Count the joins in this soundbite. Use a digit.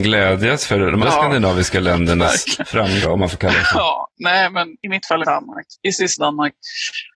5